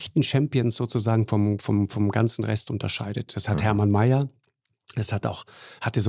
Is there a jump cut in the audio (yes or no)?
no